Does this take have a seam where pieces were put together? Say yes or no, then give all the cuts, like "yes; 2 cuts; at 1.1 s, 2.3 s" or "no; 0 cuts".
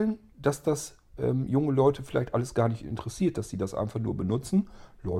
no; 0 cuts